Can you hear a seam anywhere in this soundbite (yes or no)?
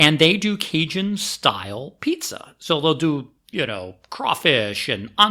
no